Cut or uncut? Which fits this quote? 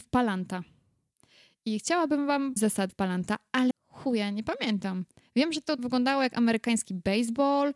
cut